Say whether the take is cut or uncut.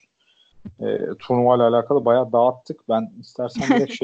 uncut